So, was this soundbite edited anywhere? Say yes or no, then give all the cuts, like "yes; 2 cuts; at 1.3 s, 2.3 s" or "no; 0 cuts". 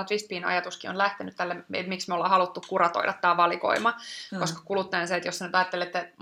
no; 0 cuts